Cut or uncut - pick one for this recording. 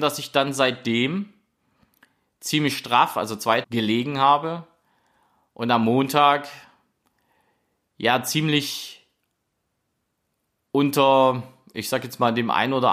cut